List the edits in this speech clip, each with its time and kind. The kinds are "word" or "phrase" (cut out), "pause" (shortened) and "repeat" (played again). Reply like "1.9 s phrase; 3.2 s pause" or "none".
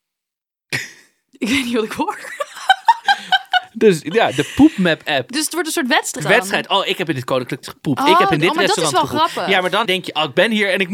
6.2 s word; 7.6 s word; 9.8 s word